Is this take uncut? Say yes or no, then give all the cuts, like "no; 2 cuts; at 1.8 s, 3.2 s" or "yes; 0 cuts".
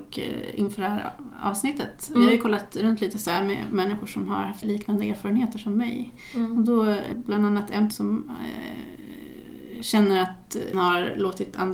no; 4 cuts; at 4.6 s, 7.1 s, 7.9 s, 10.7 s